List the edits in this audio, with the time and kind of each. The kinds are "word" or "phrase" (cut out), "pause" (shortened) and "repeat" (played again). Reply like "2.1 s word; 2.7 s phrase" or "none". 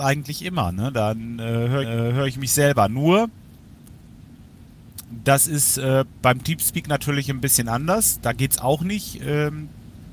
1.8 s repeat; 6.1 s pause